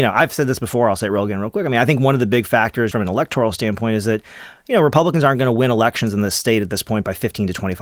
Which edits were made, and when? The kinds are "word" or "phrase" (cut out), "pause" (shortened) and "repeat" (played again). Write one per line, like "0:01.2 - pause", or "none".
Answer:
0:02.9 - word